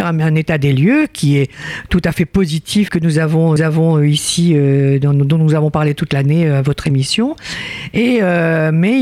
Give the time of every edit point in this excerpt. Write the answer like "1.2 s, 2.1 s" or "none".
2.9 s, 3.6 s